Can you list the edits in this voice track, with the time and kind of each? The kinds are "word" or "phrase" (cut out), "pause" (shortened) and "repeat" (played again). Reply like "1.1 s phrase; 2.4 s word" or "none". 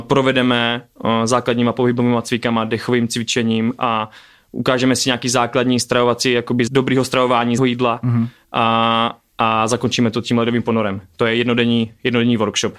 6.7 s word; 7.6 s word